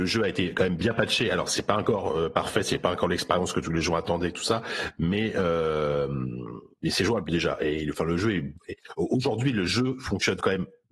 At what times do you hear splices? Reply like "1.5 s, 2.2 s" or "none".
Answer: none